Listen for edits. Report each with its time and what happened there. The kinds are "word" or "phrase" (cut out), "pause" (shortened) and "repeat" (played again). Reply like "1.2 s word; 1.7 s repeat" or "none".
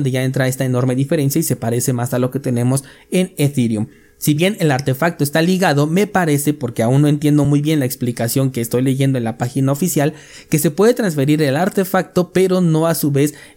none